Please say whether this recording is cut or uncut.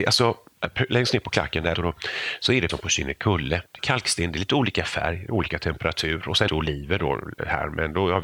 cut